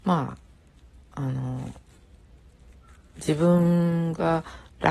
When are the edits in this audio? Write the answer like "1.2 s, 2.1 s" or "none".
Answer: none